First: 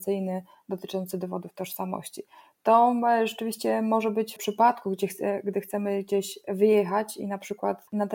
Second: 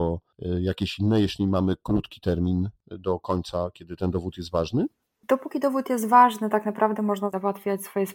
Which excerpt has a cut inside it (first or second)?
first